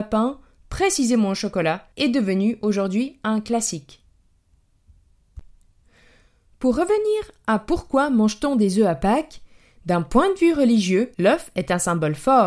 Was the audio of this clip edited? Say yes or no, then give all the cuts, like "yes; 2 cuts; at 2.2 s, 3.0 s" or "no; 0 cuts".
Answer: yes; 2 cuts; at 1.9 s, 11.1 s